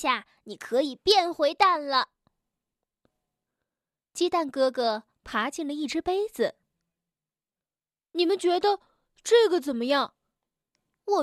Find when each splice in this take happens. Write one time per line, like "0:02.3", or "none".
none